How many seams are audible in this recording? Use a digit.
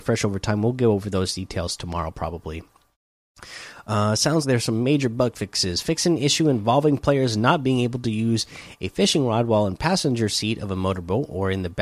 1